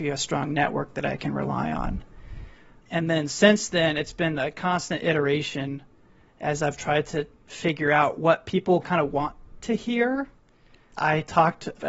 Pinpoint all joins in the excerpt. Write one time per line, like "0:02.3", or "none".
none